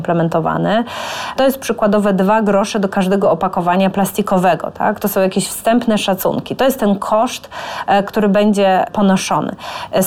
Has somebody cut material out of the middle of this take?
no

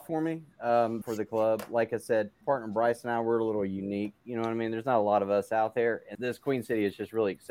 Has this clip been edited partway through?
yes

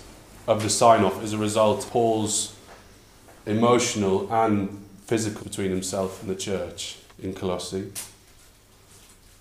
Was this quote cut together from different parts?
yes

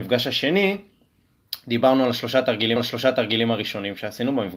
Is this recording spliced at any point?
yes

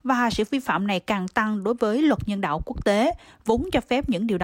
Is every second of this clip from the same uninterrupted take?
yes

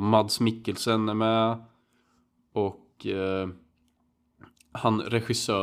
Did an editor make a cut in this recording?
no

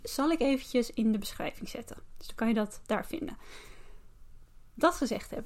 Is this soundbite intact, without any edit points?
yes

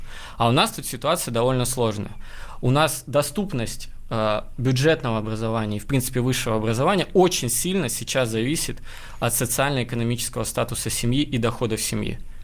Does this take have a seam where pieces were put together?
no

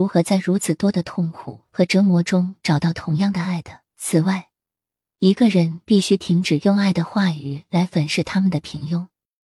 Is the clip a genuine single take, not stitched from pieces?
no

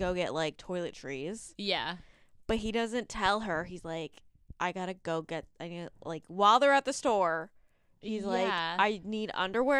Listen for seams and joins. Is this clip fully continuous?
no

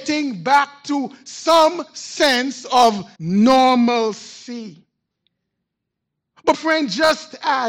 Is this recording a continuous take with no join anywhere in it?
no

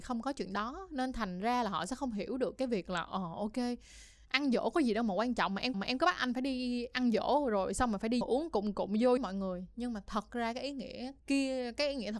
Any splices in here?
yes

